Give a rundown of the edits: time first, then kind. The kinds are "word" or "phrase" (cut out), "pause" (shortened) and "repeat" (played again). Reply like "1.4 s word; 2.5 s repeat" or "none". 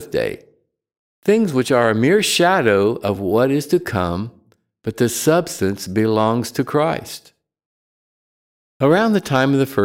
none